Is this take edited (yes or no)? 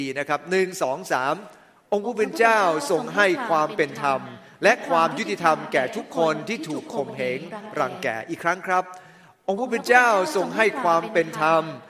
no